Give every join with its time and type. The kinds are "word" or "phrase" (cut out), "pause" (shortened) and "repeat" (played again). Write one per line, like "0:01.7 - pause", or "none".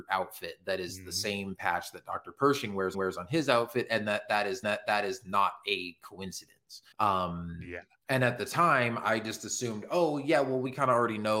0:02.9 - repeat
0:04.6 - repeat
0:06.9 - pause